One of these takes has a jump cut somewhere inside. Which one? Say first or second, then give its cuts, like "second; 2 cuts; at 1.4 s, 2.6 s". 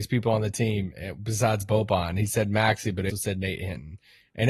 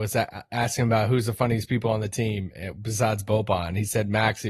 first; 1 cut; at 3.1 s